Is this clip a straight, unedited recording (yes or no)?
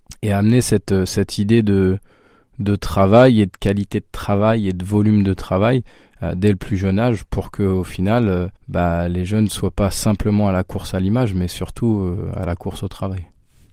no